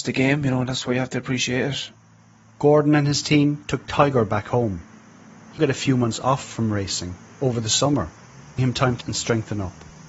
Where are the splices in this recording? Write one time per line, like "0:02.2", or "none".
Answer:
0:05.6
0:08.6
0:09.0